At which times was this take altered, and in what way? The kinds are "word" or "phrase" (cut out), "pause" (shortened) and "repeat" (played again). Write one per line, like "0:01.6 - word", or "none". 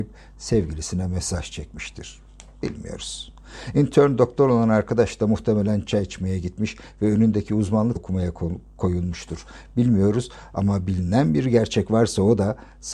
0:08.0 - phrase